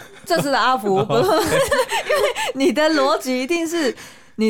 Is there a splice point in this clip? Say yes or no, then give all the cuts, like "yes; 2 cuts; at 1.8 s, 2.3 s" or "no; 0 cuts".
no; 0 cuts